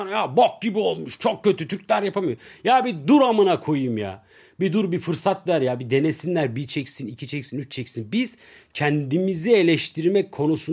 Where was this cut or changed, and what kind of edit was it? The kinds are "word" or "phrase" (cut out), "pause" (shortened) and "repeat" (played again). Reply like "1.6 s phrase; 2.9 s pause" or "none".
none